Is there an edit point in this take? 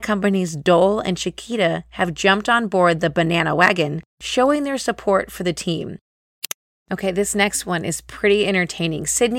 no; 0 cuts

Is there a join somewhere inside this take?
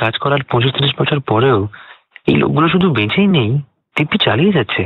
no; 0 cuts

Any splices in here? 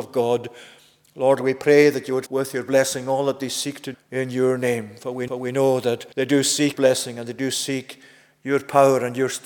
yes; 5 cuts; at 2.3 s, 3.9 s, 5.3 s, 6.1 s, 6.7 s

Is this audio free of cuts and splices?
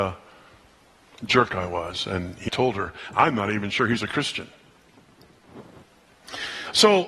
no; 1 cut; at 2.5 s

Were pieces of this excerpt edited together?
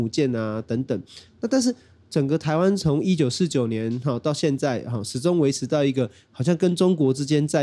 no; 0 cuts

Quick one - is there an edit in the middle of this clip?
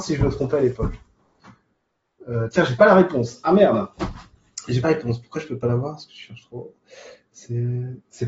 yes; 1 cut; at 4.8 s

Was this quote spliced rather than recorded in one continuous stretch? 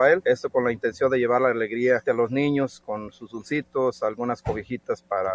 yes; 1 cut; at 2.0 s

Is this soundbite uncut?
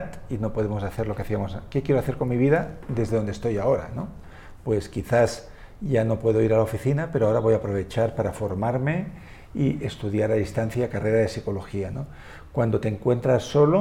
yes; 0 cuts

